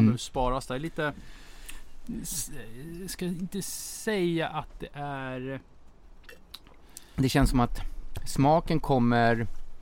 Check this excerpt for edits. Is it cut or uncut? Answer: uncut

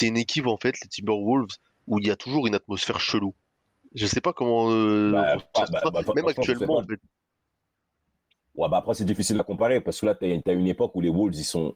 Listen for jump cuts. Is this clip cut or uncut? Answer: uncut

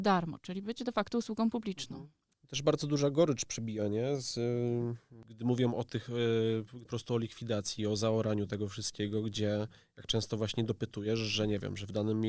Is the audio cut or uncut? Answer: cut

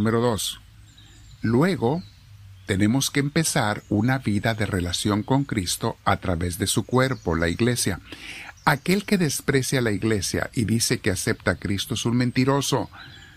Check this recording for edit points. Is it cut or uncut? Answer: uncut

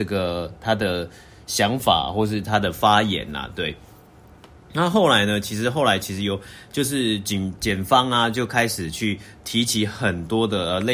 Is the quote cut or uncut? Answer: uncut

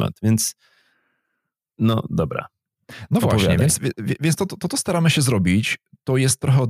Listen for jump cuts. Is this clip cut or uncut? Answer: uncut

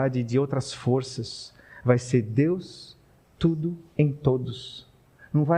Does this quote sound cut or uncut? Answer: cut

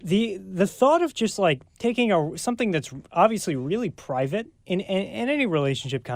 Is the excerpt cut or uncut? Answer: uncut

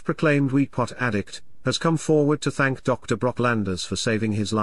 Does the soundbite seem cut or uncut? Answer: uncut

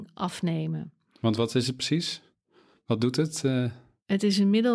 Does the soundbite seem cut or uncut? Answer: uncut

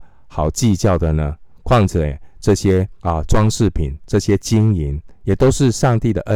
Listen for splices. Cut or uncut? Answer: cut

